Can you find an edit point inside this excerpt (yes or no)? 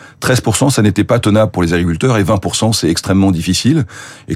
no